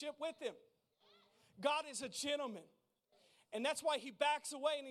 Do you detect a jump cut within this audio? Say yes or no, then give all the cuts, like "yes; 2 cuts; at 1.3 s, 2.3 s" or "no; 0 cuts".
no; 0 cuts